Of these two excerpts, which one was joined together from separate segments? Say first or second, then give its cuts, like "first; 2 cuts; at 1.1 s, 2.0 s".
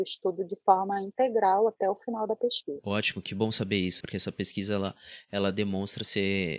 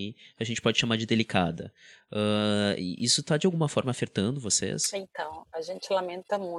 first; 1 cut; at 4.0 s